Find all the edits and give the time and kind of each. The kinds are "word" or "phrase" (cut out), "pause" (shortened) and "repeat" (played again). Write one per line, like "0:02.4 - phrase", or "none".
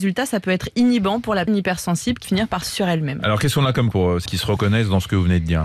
0:01.5 - word
0:02.2 - word
0:02.7 - word
0:03.9 - word
0:04.3 - word